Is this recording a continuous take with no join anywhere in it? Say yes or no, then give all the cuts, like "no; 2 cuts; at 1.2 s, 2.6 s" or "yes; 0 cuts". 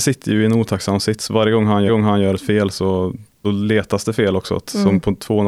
no; 2 cuts; at 1.9 s, 3.4 s